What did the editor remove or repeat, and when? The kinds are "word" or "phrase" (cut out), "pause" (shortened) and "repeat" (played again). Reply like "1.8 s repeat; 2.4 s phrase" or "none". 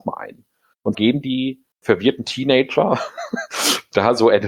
0.9 s word; 1.7 s pause